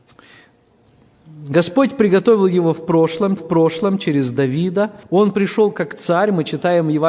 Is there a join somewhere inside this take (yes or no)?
yes